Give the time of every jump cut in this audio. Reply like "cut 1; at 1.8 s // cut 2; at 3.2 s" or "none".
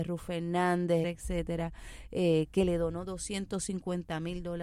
cut 1; at 1.0 s